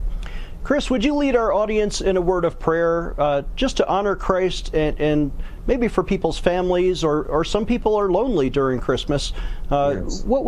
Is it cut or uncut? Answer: uncut